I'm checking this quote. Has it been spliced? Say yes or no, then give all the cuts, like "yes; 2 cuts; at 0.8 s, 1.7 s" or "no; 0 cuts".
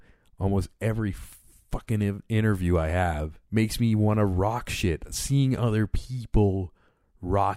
yes; 1 cut; at 3.4 s